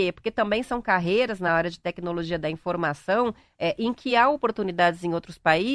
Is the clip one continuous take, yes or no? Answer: yes